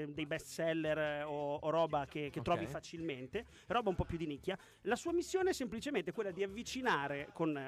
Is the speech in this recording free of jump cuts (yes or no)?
yes